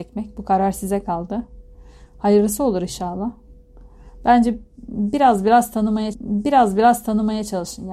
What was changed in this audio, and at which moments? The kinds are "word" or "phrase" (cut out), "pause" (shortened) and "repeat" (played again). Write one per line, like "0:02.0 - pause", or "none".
0:06.1 - repeat